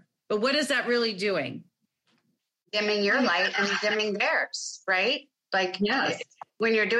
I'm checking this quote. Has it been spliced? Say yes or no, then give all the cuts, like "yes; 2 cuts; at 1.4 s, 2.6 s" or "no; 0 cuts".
no; 0 cuts